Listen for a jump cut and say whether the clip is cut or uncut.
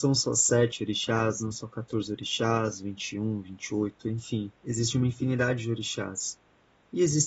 cut